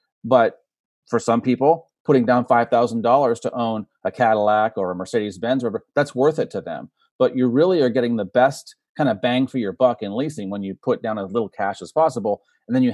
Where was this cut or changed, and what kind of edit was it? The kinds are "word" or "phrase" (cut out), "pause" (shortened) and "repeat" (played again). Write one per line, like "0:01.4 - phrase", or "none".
none